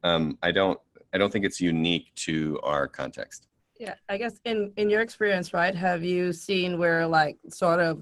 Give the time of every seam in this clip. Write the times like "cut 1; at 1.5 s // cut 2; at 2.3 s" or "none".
none